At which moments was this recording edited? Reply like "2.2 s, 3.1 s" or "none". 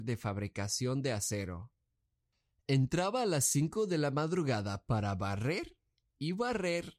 none